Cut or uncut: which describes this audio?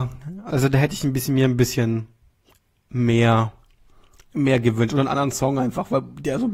uncut